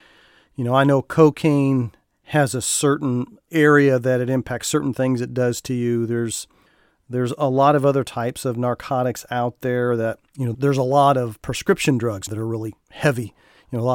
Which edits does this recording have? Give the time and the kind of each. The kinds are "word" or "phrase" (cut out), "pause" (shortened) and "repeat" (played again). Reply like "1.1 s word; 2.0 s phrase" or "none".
3.5 s word; 10.5 s word; 12.3 s word